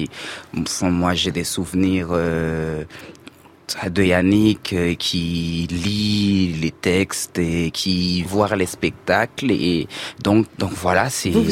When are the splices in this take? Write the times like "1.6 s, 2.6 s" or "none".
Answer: 8.2 s, 10.5 s